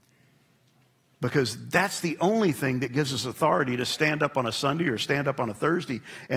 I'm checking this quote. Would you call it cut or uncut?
uncut